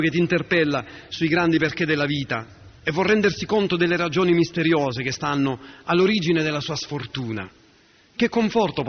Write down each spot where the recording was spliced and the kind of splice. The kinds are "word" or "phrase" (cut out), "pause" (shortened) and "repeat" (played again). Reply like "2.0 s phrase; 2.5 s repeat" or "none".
2.8 s pause